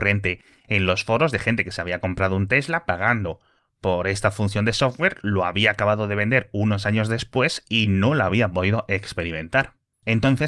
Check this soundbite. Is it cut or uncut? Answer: uncut